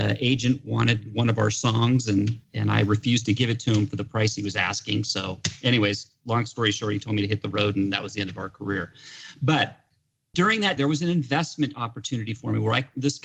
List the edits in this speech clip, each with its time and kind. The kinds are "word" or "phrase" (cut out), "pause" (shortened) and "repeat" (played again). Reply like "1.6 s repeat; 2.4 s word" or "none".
2.4 s pause; 10.8 s word